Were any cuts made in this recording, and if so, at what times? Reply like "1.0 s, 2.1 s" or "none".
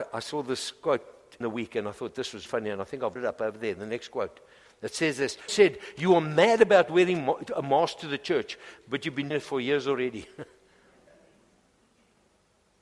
1.4 s, 2.5 s, 3.2 s, 5.5 s, 9.3 s

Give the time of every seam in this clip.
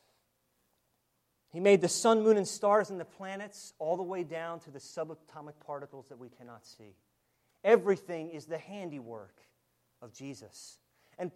none

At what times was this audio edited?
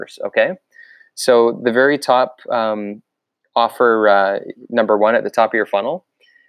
none

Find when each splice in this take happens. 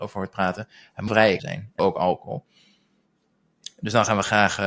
1.1 s, 1.4 s, 1.8 s

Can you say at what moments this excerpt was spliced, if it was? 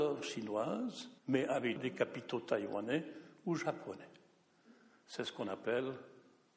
1.2 s, 1.8 s

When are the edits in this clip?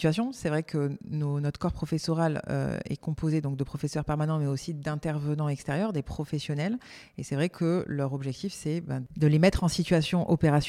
none

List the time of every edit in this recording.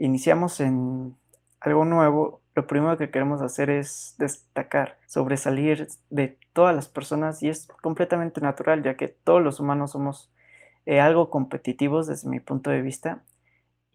5.0 s

